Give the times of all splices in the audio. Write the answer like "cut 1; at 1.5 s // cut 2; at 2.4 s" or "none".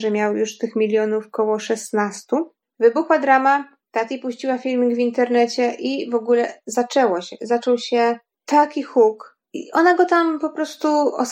none